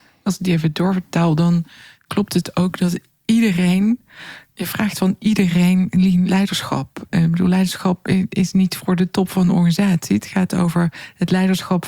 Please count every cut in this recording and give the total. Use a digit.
0